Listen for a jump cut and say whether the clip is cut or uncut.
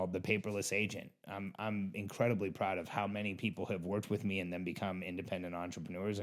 uncut